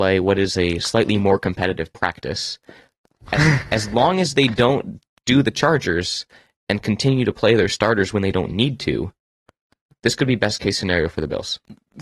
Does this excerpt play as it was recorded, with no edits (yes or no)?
yes